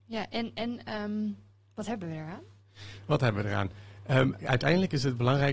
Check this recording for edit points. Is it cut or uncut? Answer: uncut